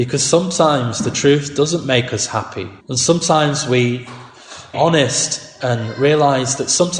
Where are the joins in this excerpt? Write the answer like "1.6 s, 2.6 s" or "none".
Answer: 2.8 s, 4.7 s